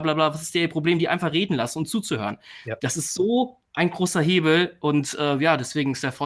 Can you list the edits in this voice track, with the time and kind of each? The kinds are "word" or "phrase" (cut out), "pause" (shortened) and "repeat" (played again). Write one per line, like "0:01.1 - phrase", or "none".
none